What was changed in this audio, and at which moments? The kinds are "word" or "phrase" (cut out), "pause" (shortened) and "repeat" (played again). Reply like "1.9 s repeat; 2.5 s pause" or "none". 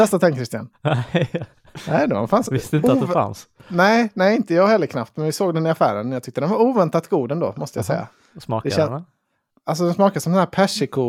none

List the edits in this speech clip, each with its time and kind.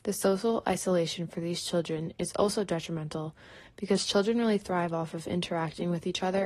none

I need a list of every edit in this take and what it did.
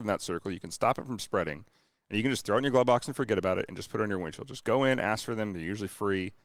none

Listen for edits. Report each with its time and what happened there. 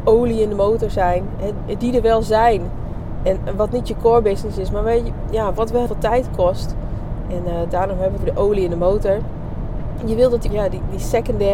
5.9 s word; 8.2 s phrase; 10.5 s word

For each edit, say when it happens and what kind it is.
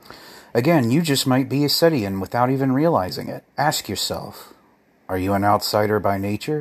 3.5 s pause

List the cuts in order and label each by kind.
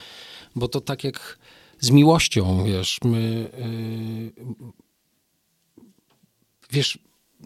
none

